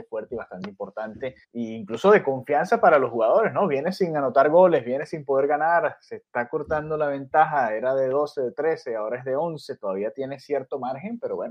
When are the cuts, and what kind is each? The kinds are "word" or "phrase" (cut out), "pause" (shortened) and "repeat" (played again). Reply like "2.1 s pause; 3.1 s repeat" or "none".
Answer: 1.4 s pause